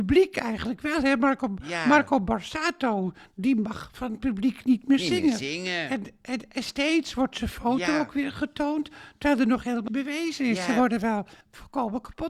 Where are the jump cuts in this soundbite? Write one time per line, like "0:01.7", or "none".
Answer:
0:09.9
0:11.4